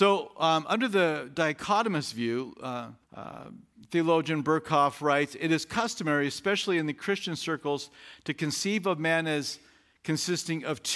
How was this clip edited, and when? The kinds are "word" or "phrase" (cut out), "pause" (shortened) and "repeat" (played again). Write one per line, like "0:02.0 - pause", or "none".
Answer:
0:03.0 - pause